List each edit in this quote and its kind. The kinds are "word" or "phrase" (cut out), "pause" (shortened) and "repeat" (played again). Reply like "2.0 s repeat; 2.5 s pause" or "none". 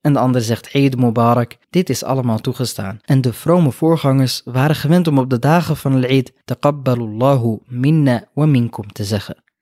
1.6 s pause; 3.0 s pause; 6.4 s pause